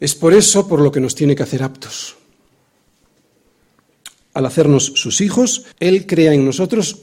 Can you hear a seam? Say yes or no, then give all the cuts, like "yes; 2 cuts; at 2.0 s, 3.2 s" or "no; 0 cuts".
yes; 1 cut; at 5.7 s